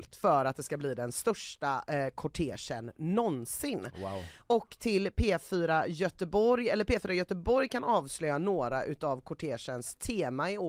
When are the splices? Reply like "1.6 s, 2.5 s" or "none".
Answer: none